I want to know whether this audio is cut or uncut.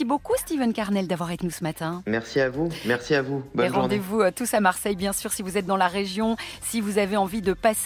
cut